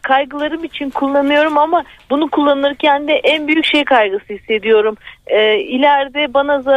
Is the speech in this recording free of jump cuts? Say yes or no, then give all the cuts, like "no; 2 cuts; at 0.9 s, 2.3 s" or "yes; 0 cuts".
yes; 0 cuts